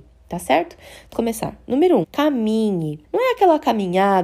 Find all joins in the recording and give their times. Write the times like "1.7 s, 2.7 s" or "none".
1.1 s, 2.0 s, 3.0 s

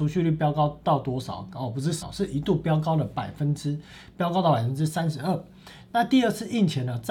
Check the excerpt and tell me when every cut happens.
2.0 s

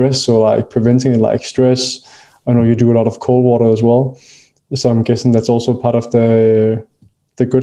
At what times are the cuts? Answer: none

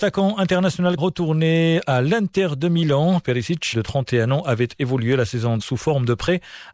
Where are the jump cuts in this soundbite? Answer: 1.0 s, 3.7 s, 5.6 s

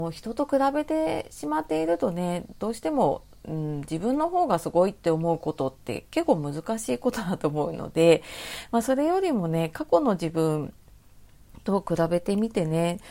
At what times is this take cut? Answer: 3.4 s

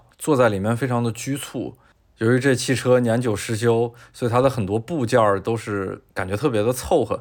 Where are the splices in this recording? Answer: 6.1 s

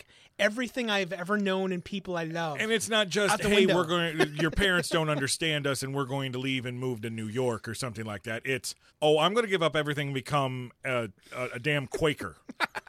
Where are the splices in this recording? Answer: 8.9 s

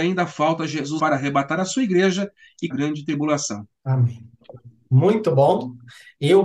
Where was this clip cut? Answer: 1.0 s, 2.7 s, 3.8 s

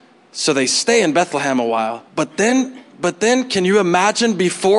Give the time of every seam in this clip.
2.1 s

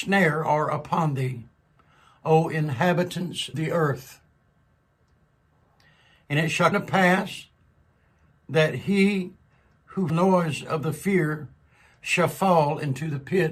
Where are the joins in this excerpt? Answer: 3.5 s, 6.7 s, 10.1 s

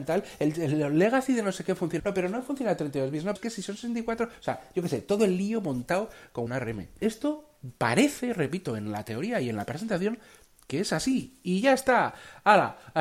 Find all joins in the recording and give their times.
2.0 s, 3.4 s, 6.5 s

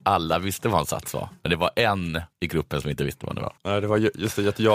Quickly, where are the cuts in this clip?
2.3 s, 3.6 s

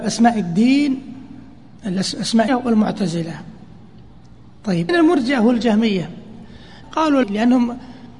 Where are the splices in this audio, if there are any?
2.5 s, 4.9 s, 6.8 s, 7.2 s

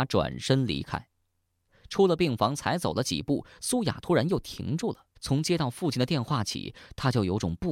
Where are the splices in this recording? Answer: 5.2 s

